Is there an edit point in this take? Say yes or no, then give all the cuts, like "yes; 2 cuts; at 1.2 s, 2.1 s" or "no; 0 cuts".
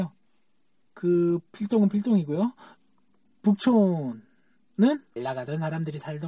yes; 1 cut; at 5.2 s